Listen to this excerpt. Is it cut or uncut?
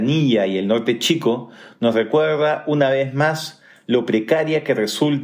uncut